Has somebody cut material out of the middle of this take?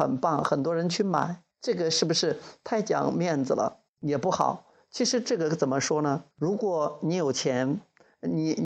yes; 3 cuts; at 1.5 s, 3.9 s, 6.3 s

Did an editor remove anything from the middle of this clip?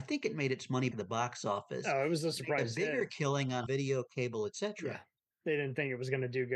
yes; 3 cuts; at 0.9 s, 3.7 s, 5.2 s

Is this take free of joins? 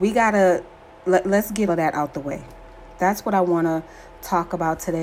no; 1 cut; at 1.7 s

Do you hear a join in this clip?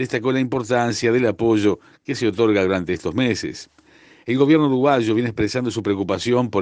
no; 0 cuts

